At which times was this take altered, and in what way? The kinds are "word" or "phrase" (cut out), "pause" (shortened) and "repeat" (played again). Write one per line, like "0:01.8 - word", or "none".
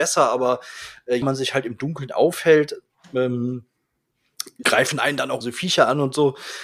0:01.2 - word
0:04.6 - word
0:05.4 - word